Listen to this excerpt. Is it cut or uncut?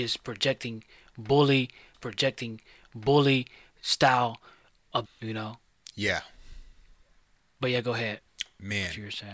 cut